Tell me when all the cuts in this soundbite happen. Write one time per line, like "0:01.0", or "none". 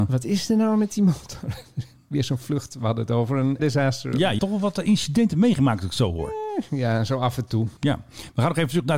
0:03.6
0:04.4